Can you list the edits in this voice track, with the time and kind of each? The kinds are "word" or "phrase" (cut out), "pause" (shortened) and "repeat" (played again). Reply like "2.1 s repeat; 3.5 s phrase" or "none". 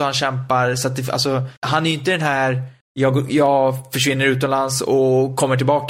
1.6 s pause; 2.8 s pause